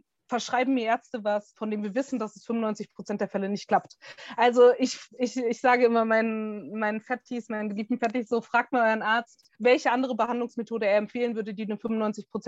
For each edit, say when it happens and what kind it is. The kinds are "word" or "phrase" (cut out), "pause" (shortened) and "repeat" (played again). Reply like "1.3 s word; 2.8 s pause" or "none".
9.5 s pause